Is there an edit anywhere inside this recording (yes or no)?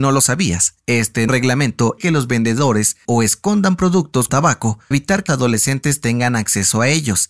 yes